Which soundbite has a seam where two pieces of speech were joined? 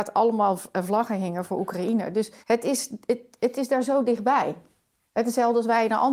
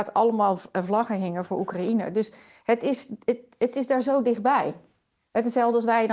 first; 1 cut; at 2.4 s

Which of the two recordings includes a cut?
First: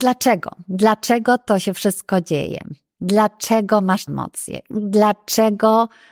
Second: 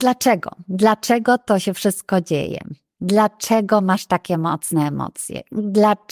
first; 1 cut; at 4.1 s

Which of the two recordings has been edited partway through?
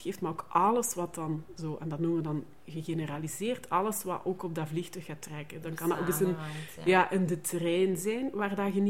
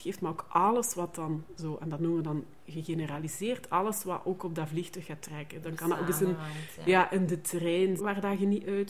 second; 1 cut; at 8.0 s

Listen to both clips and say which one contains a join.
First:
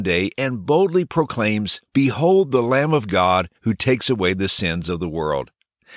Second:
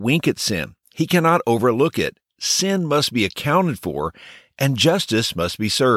first; 2 cuts; at 1.9 s, 3.5 s

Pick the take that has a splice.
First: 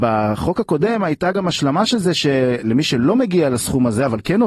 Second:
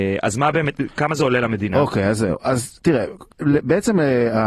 second; 1 cut; at 3.3 s

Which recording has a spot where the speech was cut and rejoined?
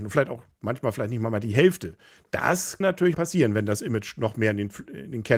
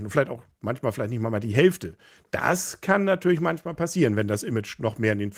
first; 2 cuts; at 2.8 s, 3.1 s

